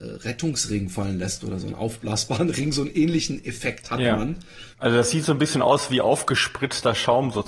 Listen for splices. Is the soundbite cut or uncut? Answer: cut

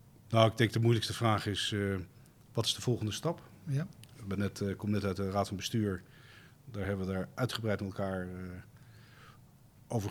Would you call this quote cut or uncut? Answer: uncut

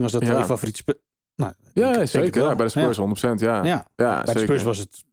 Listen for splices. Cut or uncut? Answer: uncut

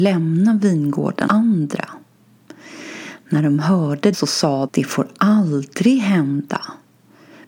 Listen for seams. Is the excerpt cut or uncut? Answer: cut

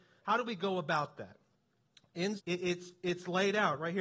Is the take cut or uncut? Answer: cut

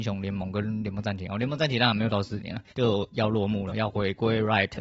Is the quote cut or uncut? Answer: cut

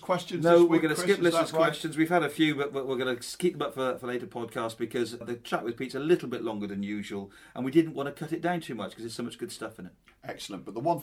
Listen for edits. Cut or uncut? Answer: uncut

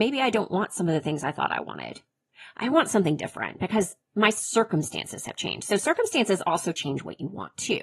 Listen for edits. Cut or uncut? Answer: uncut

